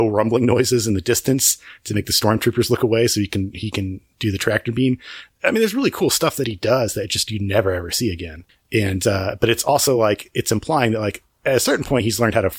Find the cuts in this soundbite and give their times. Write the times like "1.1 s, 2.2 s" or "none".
none